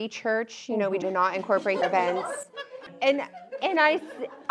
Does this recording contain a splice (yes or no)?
yes